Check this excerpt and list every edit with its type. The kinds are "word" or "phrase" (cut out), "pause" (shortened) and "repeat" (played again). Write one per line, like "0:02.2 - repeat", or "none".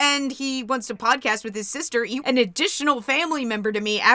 0:01.0 - phrase
0:02.2 - phrase